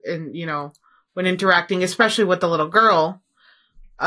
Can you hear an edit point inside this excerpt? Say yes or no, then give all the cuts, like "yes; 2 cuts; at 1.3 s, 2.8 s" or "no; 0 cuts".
no; 0 cuts